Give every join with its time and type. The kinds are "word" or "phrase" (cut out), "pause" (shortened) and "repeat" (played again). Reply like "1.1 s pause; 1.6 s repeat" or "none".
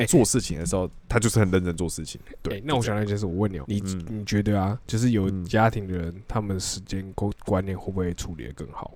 1.0 s pause; 3.6 s word; 4.8 s pause; 7.4 s pause